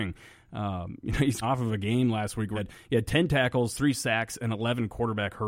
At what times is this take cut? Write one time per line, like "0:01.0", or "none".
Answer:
0:01.4
0:02.6